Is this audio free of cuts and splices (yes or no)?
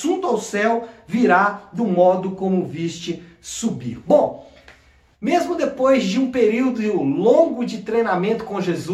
yes